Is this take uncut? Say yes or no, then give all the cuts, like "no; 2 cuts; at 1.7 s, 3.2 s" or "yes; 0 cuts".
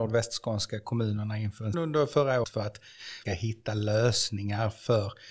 no; 3 cuts; at 1.7 s, 2.4 s, 3.3 s